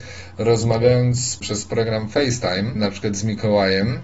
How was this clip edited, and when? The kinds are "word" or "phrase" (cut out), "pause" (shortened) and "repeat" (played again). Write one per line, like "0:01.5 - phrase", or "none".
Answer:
none

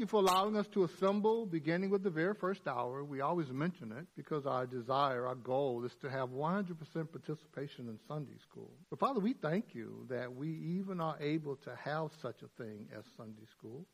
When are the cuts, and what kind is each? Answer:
0:04.1 - pause
0:08.8 - pause

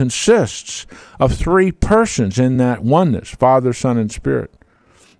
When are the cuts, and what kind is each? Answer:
none

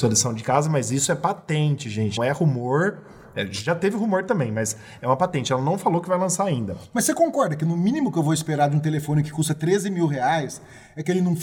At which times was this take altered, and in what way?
0:02.2 - word

